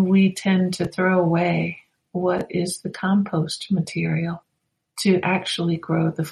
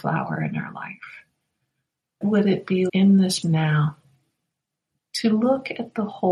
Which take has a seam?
second; 3 cuts; at 2.2 s, 2.9 s, 3.4 s

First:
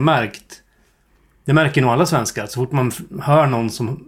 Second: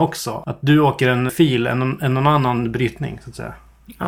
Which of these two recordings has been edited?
second; 1 cut; at 1.3 s

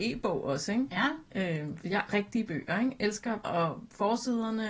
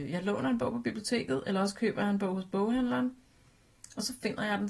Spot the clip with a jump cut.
first; 2 cuts; at 2.1 s, 3.4 s

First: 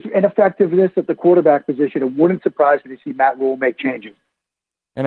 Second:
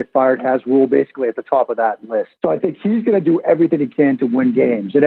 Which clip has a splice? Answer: second; 1 cut; at 2.3 s

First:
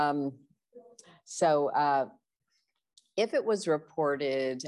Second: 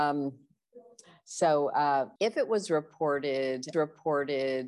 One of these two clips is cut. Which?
second; 2 cuts; at 2.2 s, 3.7 s

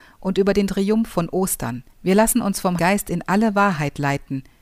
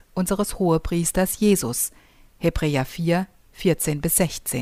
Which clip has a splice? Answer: first; 2 cuts; at 1.9 s, 2.8 s

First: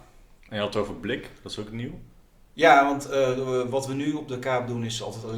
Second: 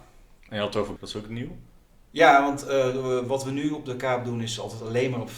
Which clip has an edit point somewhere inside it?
second; 1 cut; at 1.0 s

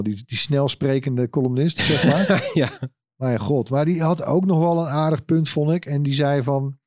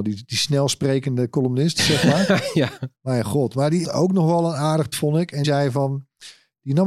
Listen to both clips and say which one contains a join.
second; 4 cuts; at 2.9 s, 3.8 s, 4.9 s, 5.4 s

